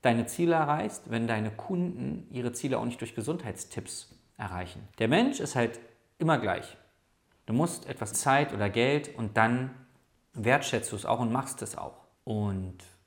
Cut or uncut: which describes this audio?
cut